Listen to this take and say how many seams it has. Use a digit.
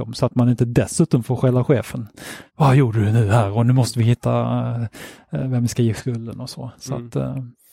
1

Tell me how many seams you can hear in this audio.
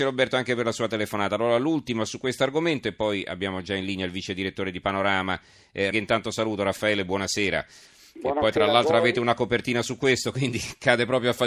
1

